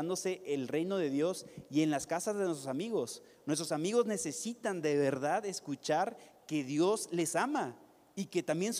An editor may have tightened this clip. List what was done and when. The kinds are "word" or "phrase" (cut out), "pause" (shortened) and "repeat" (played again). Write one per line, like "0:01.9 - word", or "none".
none